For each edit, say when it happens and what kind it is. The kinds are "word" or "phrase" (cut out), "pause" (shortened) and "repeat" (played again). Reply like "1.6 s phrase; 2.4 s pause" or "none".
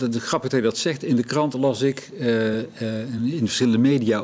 none